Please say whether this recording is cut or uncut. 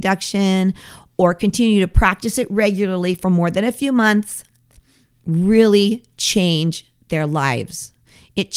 uncut